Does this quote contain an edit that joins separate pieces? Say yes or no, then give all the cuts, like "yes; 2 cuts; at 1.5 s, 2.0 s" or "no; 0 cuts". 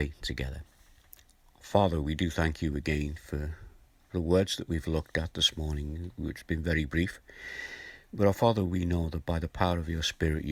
no; 0 cuts